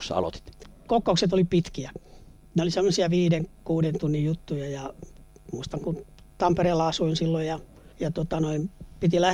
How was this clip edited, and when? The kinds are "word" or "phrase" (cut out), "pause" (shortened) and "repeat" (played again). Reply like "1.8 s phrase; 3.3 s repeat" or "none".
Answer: 6.3 s pause